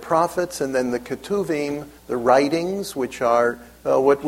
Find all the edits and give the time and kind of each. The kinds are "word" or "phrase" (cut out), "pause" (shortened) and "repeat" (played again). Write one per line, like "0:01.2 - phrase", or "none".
0:02.0 - pause

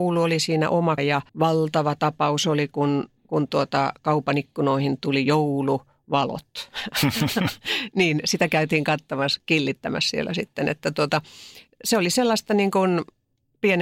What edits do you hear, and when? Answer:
0:01.0 - phrase
0:01.3 - pause
0:03.2 - pause

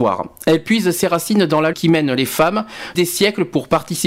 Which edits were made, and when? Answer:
0:01.7 - word
0:02.9 - word

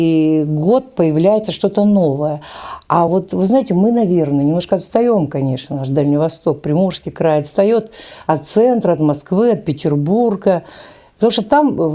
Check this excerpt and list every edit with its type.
none

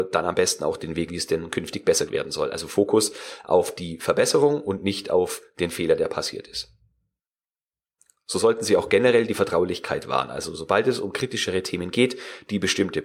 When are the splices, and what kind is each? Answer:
0:01.1 - word
0:02.1 - word

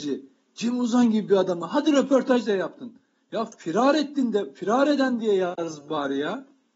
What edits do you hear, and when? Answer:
none

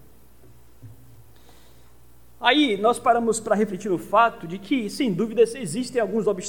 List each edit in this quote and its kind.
none

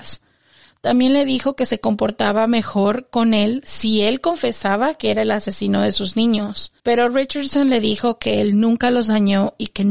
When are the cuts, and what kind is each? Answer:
0:06.8 - pause

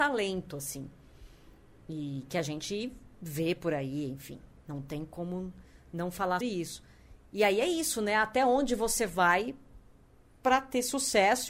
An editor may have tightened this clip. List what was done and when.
0:06.4 - word

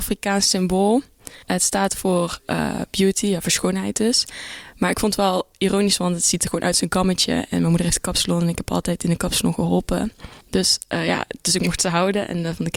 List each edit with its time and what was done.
0:01.4 - pause
0:10.4 - pause

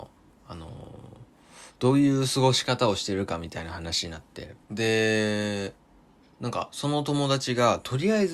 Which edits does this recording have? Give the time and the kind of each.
0:04.6 - pause

